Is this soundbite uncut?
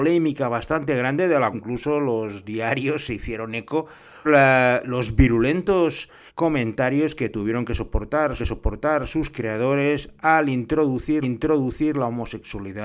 no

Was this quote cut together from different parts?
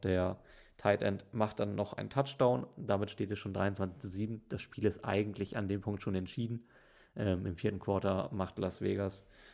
no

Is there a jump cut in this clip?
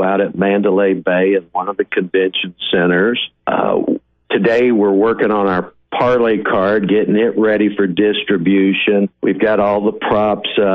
yes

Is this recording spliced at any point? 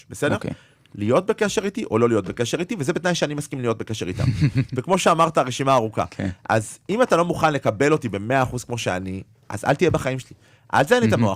no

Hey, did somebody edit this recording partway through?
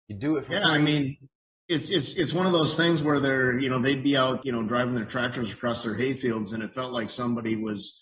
no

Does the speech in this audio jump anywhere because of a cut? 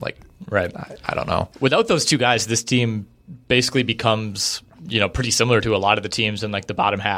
no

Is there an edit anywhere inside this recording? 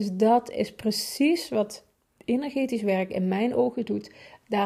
no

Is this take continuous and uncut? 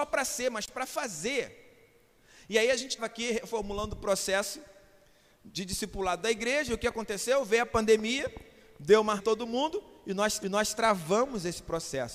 no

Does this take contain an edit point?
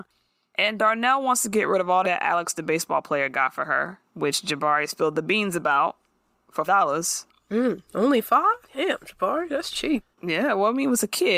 yes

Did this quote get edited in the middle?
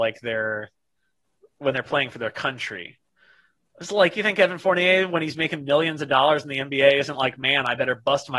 no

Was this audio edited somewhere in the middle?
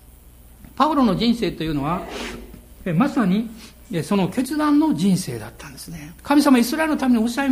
yes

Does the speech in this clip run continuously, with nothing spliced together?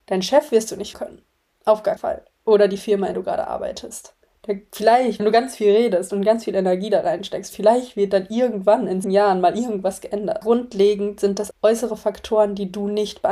no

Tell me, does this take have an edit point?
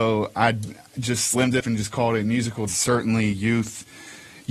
yes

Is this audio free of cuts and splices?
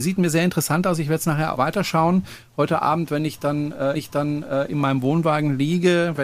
no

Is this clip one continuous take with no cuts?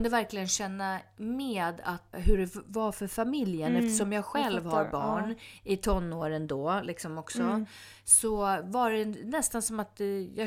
no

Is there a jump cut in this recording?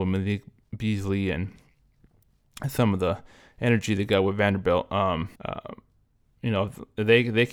yes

